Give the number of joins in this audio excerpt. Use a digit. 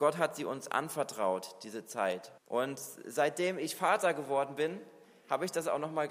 1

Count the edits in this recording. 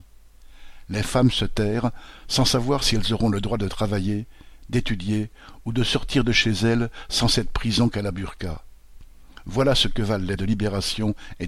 1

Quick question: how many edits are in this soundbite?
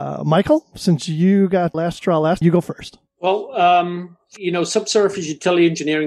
4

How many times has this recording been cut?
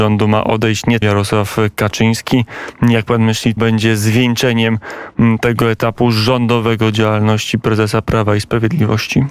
2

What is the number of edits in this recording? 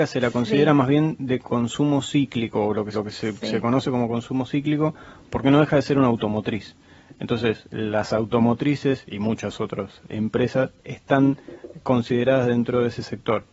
1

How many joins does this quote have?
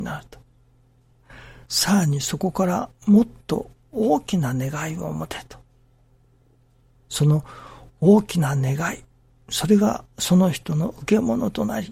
3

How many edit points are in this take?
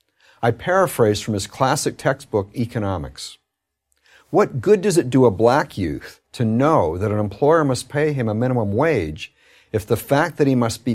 0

